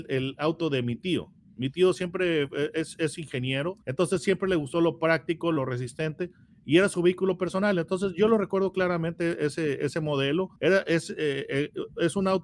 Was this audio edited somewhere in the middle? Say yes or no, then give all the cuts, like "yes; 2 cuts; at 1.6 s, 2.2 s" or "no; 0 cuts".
yes; 2 cuts; at 3.8 s, 10.6 s